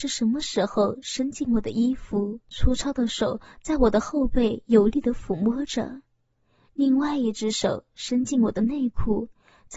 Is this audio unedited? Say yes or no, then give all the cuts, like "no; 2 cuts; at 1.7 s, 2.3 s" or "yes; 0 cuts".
no; 1 cut; at 2.4 s